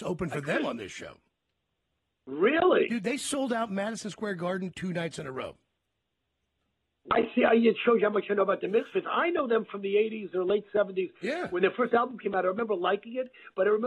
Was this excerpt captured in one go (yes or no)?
yes